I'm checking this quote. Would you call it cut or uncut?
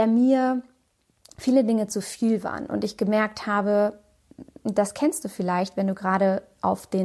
uncut